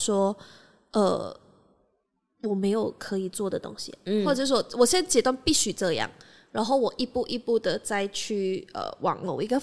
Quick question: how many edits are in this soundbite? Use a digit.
0